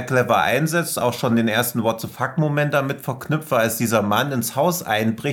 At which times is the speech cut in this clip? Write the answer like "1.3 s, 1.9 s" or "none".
none